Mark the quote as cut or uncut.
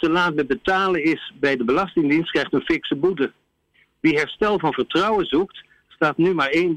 uncut